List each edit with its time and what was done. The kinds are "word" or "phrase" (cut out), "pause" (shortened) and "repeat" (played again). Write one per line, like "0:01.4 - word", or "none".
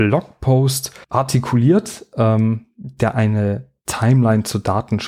0:01.0 - pause